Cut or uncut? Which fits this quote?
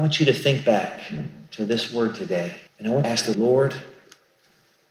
cut